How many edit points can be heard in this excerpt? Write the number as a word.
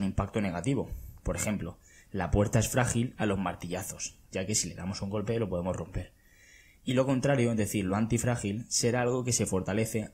zero